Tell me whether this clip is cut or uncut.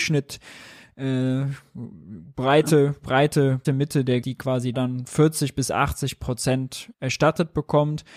cut